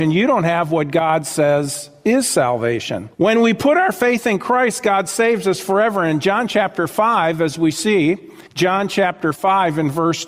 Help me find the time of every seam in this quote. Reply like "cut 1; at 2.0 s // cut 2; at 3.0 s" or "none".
cut 1; at 3.1 s // cut 2; at 8.5 s